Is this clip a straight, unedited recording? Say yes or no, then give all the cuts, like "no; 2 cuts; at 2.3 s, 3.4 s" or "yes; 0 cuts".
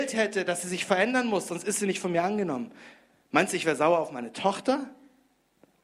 yes; 0 cuts